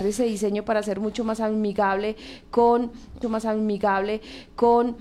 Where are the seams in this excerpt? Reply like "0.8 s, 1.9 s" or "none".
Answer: 3.2 s